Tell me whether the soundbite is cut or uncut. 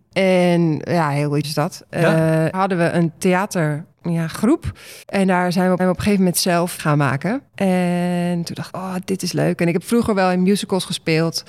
cut